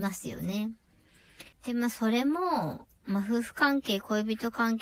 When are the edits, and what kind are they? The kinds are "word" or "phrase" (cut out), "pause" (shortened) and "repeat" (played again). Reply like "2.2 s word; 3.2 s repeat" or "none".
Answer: 1.5 s pause